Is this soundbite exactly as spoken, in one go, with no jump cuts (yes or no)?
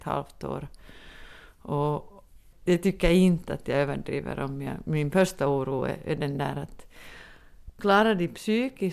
yes